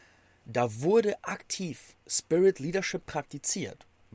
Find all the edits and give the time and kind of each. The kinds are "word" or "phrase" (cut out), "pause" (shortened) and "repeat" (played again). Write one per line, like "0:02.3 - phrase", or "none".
0:02.0 - pause